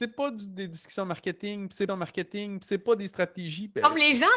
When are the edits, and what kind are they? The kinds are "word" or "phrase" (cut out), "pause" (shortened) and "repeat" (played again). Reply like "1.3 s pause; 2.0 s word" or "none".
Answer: 1.9 s repeat